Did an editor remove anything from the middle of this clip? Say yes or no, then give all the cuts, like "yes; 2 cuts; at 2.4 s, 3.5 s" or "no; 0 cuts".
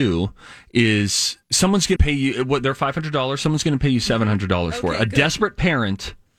yes; 2 cuts; at 1.4 s, 2.0 s